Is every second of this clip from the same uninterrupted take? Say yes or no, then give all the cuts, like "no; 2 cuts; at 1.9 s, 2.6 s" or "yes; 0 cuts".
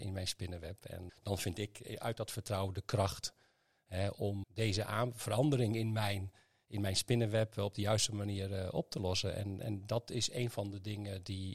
no; 2 cuts; at 1.1 s, 4.4 s